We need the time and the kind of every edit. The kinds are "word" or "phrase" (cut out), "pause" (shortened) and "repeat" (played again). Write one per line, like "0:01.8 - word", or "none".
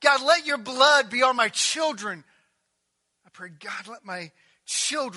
none

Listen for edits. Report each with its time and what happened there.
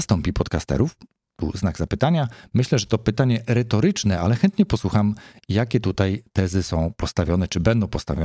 none

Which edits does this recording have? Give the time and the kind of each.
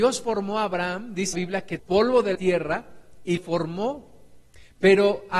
0:01.3 - word
0:01.8 - word
0:02.3 - word
0:03.4 - word

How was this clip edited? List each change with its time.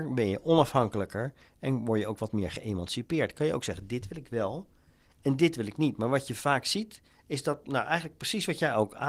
none

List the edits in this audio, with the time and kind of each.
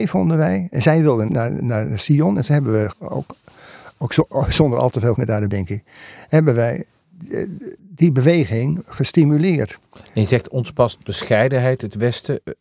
0:01.3 - word
0:02.9 - word
0:05.1 - word
0:05.5 - word
0:07.8 - pause
0:09.9 - pause

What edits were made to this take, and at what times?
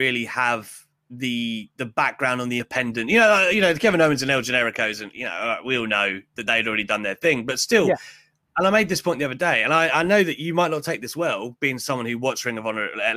0:00.9 - pause

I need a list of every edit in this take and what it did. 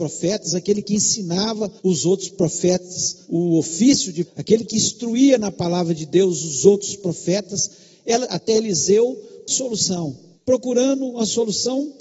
0:01.8 - pause
0:03.2 - pause
0:04.2 - word
0:08.2 - word
0:09.5 - phrase
0:10.3 - pause

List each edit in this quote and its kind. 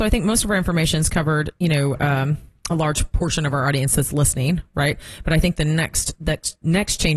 none

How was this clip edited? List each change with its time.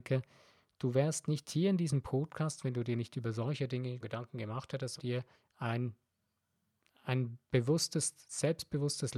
0:04.0 - word
0:05.0 - word
0:05.3 - pause

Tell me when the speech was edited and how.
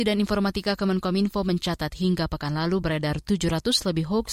none

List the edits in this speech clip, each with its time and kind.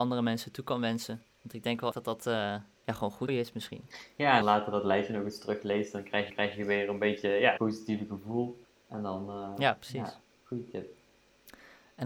0:01.3 - pause
0:01.9 - word
0:03.3 - word
0:04.4 - phrase
0:06.3 - repeat
0:07.6 - word
0:08.6 - pause
0:10.2 - pause

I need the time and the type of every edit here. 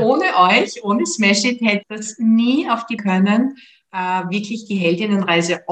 0:01.8 - word
0:03.0 - phrase

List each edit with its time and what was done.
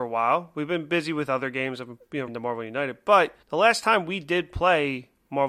0:02.3 - word
0:03.4 - pause

